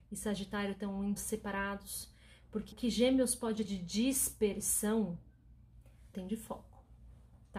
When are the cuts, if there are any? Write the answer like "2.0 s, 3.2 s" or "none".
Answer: 1.2 s, 2.7 s, 3.6 s, 6.1 s